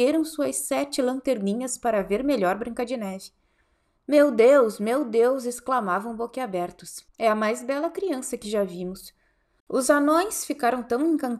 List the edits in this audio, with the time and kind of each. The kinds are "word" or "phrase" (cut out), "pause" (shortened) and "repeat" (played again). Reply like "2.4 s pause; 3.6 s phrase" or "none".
7.1 s pause